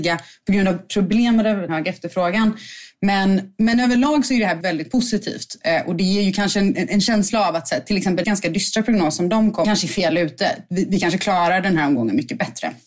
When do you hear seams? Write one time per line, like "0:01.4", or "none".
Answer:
0:01.7
0:04.6
0:06.7
0:08.2
0:09.6